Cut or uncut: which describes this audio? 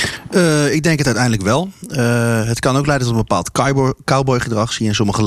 uncut